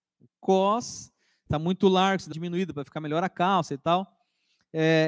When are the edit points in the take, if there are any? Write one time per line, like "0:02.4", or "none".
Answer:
0:01.5
0:02.3